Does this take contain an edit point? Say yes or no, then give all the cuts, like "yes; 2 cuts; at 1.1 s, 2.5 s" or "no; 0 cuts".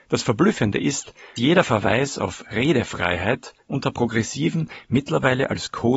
yes; 2 cuts; at 1.4 s, 3.6 s